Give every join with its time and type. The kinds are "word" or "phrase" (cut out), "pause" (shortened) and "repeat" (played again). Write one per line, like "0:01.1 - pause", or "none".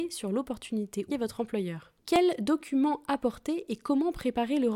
0:01.1 - phrase
0:02.0 - pause